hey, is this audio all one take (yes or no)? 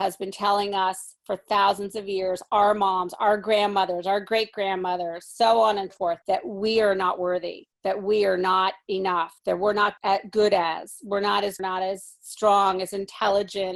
no